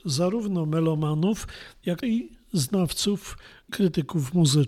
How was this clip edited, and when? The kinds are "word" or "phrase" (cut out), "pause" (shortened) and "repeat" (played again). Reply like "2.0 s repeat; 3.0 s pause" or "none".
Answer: 2.0 s word; 3.7 s word